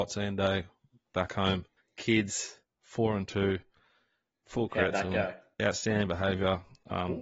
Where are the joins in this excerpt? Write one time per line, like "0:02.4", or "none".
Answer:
0:01.8